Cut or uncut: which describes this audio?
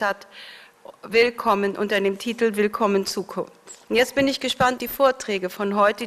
cut